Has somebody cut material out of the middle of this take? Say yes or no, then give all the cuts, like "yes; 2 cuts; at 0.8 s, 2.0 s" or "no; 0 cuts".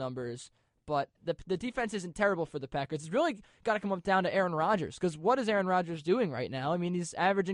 yes; 1 cut; at 1.1 s